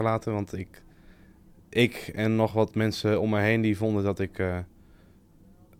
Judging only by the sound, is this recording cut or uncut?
uncut